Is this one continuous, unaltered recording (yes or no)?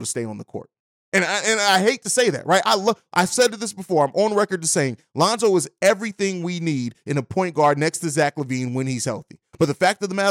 yes